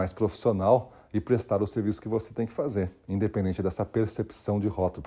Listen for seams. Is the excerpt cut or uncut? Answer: uncut